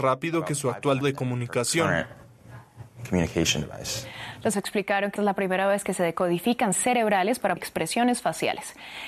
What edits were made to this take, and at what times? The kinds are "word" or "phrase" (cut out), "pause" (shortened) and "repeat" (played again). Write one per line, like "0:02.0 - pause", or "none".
0:01.0 - word
0:04.5 - word
0:05.2 - word
0:06.7 - word
0:07.6 - phrase

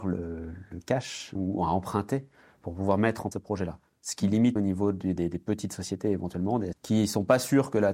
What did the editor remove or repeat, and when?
0:01.3 - word
0:03.3 - word
0:04.6 - word
0:05.2 - word
0:06.7 - word

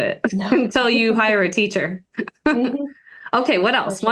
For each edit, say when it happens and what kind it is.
none

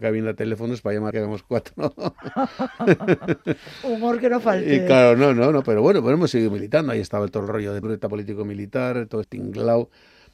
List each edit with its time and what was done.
0:01.1 - phrase
0:07.8 - word
0:09.2 - word

